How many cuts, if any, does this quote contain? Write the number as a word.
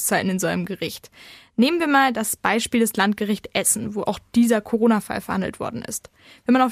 zero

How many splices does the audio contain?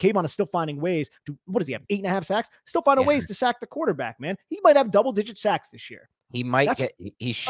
zero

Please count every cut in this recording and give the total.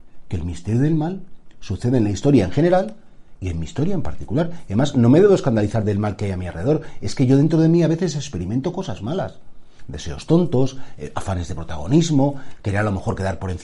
zero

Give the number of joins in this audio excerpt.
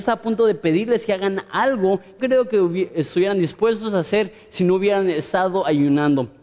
one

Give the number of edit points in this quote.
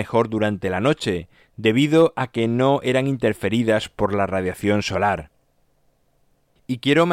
zero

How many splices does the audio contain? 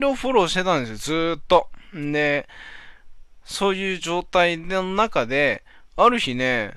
zero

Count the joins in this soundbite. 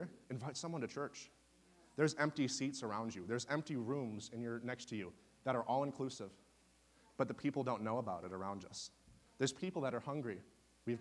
zero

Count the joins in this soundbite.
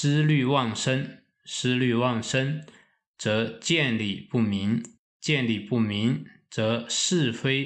zero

